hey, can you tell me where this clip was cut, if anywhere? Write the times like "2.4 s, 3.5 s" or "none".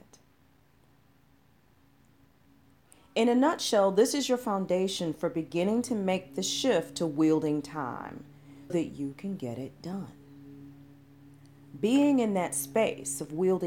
8.7 s